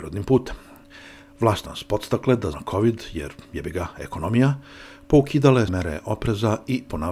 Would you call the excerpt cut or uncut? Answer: cut